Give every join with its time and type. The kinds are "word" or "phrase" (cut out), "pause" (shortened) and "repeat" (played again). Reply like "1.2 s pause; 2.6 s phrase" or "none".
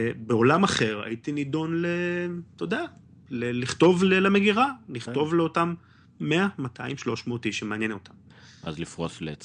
none